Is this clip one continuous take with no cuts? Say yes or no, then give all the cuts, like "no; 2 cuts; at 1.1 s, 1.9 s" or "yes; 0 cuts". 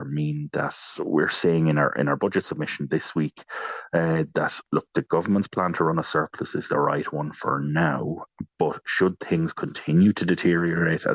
yes; 0 cuts